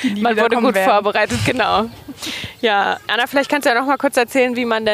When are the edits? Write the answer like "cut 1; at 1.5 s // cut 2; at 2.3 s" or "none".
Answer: cut 1; at 3.1 s